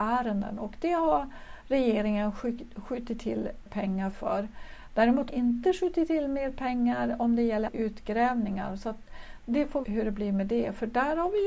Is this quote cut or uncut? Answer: cut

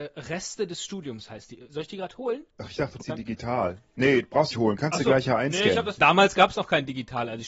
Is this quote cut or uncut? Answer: cut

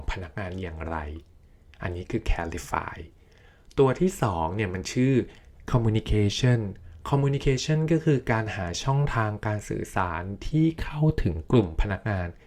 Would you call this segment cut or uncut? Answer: uncut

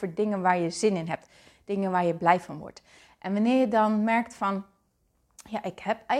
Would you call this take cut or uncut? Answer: uncut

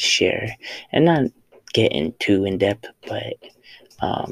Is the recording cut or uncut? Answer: uncut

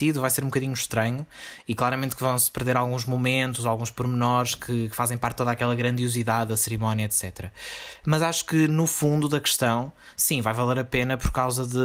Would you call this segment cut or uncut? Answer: uncut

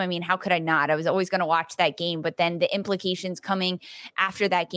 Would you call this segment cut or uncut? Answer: uncut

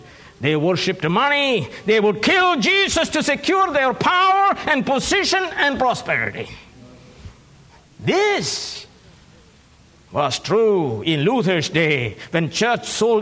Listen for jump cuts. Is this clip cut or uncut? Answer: uncut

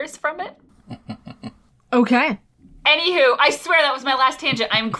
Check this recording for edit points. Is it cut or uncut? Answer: uncut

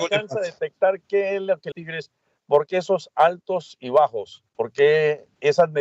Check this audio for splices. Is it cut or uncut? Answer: cut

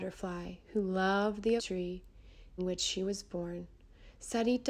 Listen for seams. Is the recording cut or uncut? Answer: cut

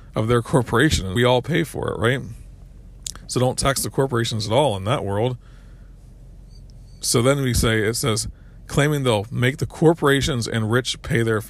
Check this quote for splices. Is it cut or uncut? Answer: cut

